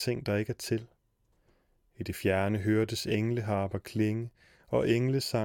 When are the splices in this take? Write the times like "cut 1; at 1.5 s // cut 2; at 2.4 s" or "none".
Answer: none

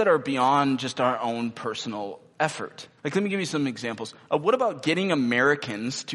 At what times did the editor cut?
cut 1; at 3.0 s

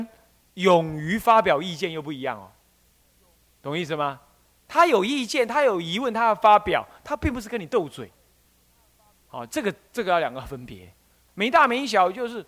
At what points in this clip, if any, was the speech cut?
cut 1; at 11.3 s

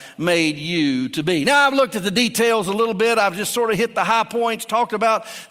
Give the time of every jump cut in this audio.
none

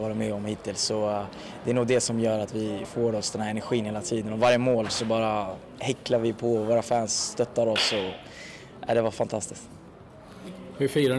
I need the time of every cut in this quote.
cut 1; at 2.8 s

